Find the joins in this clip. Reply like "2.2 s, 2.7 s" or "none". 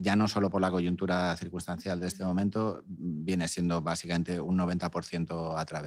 none